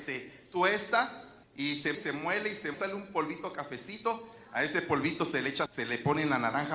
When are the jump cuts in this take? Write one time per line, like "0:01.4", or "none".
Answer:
0:01.4
0:01.9
0:02.7
0:05.7